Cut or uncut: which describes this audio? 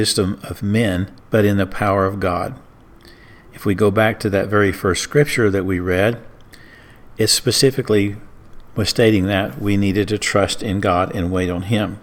cut